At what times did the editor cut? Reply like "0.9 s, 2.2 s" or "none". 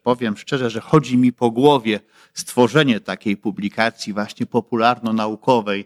none

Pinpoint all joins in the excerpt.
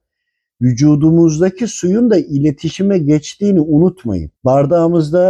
4.4 s

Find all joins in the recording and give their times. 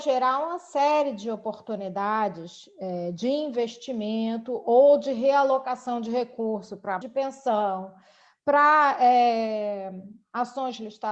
7.0 s

